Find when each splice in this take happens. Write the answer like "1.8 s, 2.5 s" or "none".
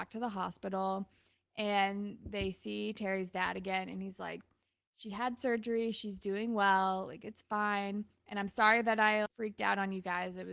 9.3 s